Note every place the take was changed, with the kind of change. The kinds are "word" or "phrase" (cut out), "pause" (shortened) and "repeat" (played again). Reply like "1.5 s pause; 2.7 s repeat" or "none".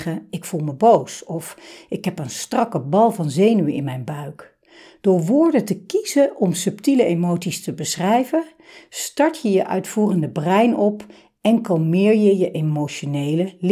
none